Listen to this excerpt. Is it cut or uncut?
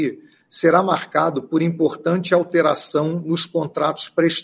uncut